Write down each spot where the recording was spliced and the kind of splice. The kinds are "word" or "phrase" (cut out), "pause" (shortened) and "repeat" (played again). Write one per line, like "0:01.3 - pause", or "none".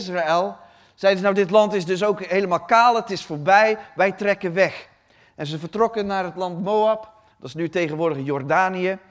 none